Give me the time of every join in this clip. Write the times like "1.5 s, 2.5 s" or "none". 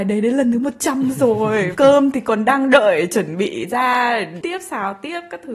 1.7 s, 4.4 s